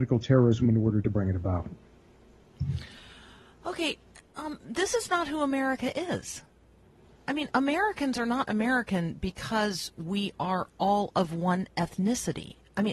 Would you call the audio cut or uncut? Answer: cut